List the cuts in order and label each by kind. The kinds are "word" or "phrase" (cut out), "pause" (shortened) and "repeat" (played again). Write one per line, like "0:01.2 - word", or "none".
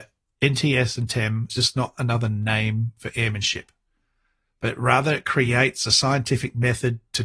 0:01.5 - word